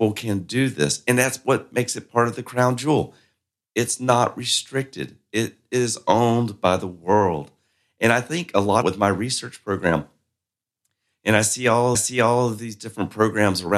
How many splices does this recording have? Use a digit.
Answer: 2